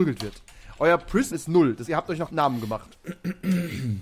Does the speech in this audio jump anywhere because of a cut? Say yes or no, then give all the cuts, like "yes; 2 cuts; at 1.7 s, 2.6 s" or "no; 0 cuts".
yes; 3 cuts; at 1.3 s, 1.8 s, 2.3 s